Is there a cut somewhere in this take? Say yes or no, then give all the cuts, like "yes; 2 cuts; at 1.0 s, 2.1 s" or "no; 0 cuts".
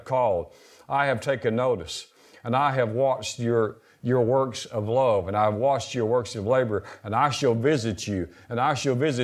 no; 0 cuts